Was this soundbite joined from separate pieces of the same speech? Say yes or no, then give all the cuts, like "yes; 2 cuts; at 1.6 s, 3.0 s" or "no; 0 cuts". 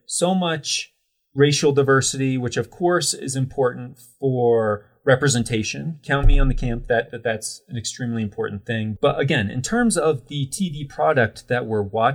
yes; 1 cut; at 6.9 s